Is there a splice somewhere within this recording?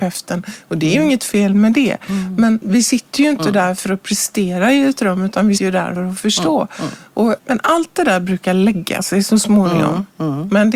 yes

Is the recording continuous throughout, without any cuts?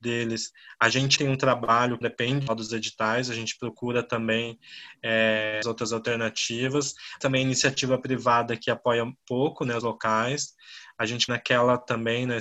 no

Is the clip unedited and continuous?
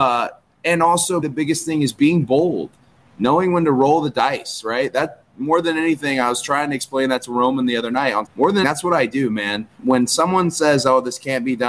no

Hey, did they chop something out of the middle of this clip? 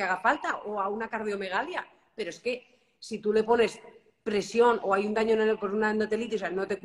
no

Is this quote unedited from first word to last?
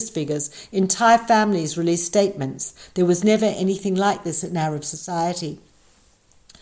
yes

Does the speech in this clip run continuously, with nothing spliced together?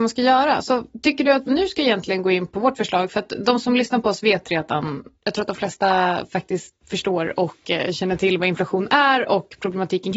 no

